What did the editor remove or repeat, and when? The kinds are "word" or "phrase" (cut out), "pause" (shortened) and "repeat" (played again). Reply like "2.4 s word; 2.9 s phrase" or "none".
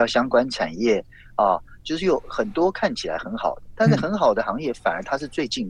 none